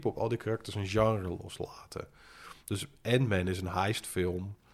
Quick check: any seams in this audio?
no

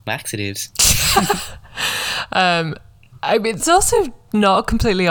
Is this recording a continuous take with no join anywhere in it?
no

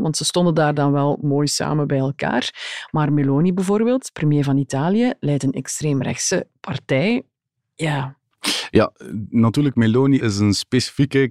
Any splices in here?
no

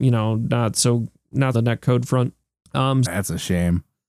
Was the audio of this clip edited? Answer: yes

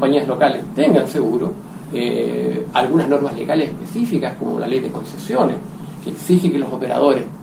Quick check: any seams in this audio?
no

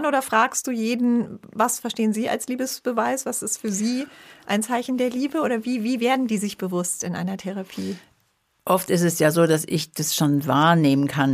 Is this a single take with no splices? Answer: yes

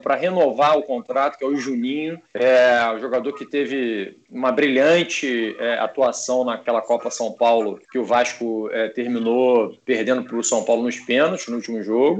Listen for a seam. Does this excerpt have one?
yes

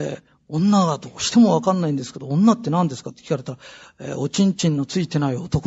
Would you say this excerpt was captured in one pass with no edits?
yes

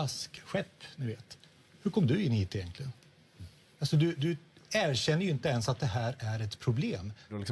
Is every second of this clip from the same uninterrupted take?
yes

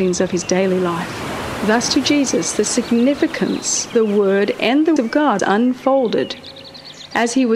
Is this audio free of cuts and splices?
no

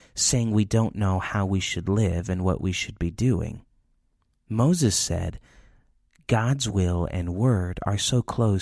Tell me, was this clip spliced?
no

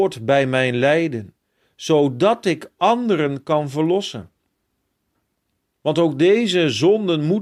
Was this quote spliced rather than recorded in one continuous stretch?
no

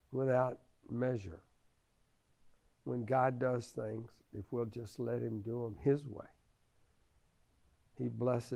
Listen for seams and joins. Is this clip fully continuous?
yes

